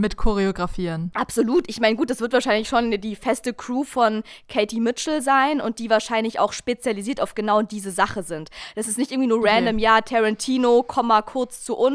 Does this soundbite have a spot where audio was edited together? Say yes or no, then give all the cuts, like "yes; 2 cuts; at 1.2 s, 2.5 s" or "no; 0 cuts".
no; 0 cuts